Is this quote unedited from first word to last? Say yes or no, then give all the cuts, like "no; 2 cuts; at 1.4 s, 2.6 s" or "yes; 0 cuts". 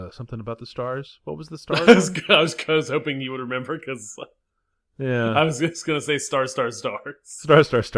yes; 0 cuts